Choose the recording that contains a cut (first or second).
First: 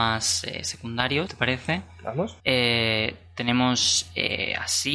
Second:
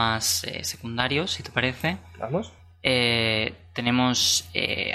first